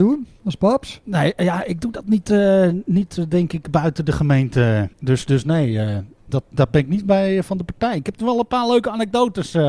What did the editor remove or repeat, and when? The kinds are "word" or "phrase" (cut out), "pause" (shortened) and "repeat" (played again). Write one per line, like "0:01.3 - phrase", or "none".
0:04.9 - pause